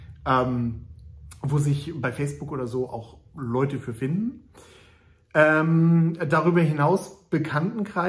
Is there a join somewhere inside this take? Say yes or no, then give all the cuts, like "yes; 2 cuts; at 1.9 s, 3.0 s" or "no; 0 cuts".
no; 0 cuts